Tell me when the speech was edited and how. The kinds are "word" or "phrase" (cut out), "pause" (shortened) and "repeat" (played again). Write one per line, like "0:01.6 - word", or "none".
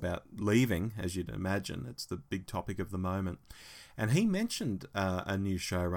none